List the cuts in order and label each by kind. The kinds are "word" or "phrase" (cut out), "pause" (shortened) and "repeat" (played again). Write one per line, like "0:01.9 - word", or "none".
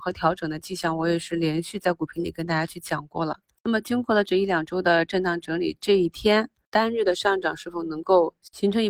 none